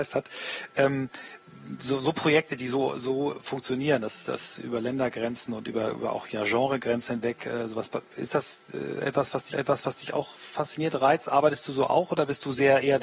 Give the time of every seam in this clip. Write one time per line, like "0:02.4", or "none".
0:09.5

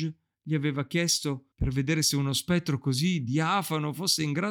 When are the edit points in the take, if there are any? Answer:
0:01.5

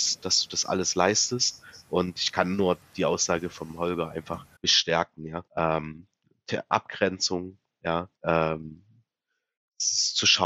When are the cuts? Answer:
0:04.6
0:05.5
0:08.2

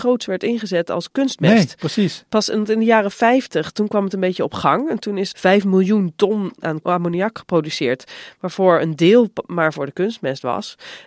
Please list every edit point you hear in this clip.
0:05.3

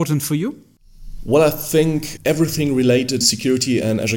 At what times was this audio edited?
0:02.2
0:03.2

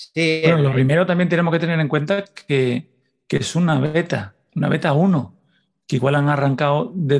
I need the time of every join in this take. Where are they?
none

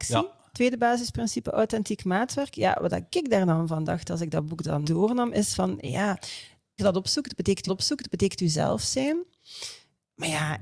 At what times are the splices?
0:04.8
0:06.8
0:07.7

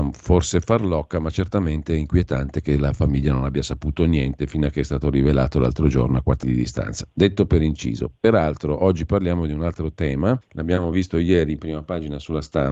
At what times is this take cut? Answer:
0:06.4
0:10.4

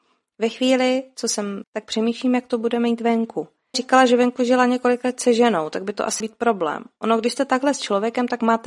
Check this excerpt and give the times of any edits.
0:01.6
0:03.7
0:06.2

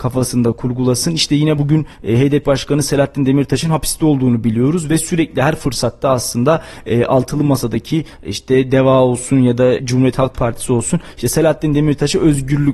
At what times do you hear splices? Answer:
0:01.6
0:02.4
0:09.8

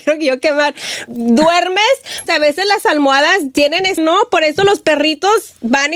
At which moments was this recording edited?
0:02.3
0:04.0

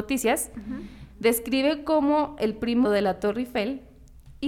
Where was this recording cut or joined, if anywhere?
0:02.8

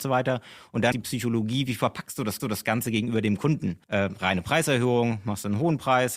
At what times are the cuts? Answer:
0:00.9
0:02.4
0:03.8

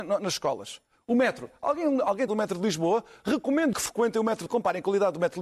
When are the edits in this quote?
0:02.3
0:03.7
0:04.5

